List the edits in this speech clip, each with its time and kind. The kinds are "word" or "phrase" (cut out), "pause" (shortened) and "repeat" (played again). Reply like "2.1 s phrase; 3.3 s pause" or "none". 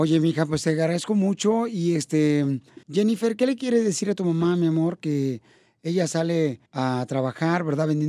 2.8 s pause; 6.7 s pause